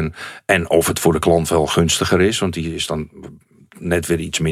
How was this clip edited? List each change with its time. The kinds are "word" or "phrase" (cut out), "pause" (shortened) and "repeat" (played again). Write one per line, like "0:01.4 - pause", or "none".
none

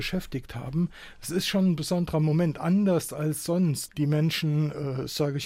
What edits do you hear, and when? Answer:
0:03.9 - word

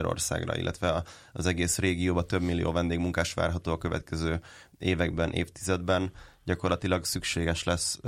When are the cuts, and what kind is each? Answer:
none

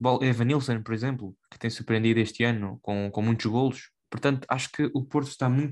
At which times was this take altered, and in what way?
0:01.4 - pause
0:04.0 - pause

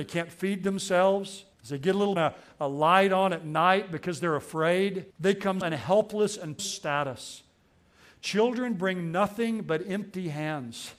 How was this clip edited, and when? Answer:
0:01.5 - pause
0:02.2 - phrase
0:05.1 - pause
0:05.6 - word
0:06.6 - phrase

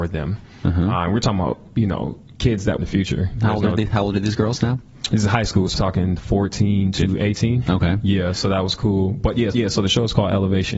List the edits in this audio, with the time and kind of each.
0:02.8 - phrase
0:05.7 - word
0:09.5 - repeat

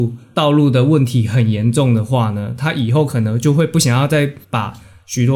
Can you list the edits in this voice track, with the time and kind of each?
0:04.4 - pause

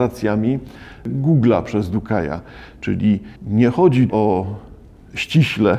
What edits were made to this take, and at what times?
0:03.4 - pause
0:04.1 - word

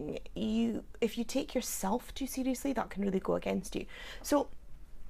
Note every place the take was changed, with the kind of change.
none

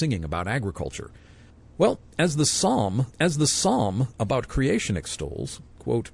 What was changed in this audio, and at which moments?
0:01.5 - pause
0:03.1 - repeat

